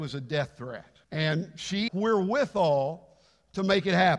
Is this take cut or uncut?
cut